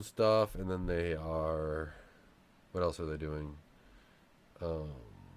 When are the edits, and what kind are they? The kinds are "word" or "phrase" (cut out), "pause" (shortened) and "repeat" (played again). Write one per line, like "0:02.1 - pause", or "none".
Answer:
none